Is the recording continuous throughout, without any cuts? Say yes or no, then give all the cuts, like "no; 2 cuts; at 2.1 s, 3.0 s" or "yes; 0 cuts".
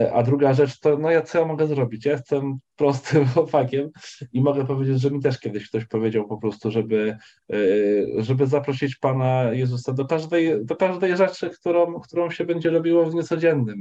yes; 0 cuts